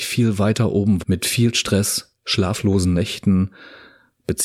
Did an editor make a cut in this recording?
yes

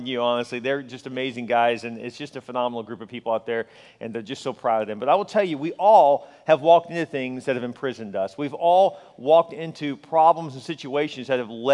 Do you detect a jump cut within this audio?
no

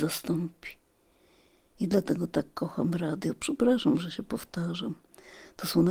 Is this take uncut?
yes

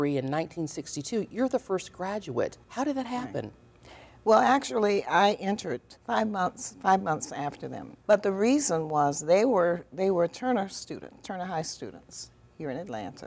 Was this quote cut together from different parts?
yes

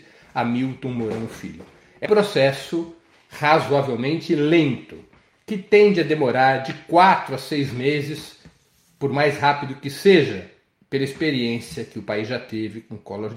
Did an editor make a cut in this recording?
yes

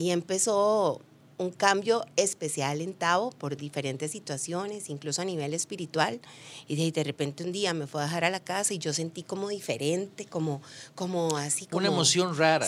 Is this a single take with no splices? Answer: yes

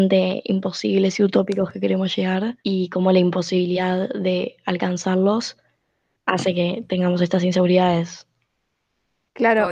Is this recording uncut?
no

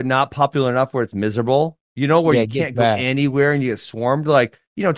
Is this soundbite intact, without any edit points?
yes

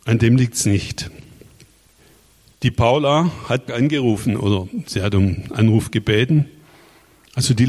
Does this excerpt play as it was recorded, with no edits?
no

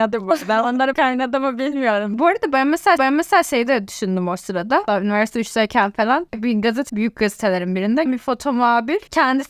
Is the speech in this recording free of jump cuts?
no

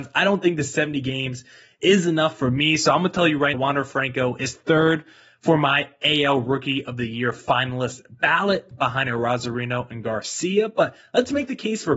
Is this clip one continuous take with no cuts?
no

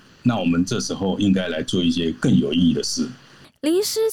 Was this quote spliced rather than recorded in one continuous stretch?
no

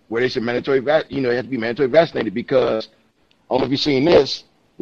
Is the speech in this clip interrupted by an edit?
no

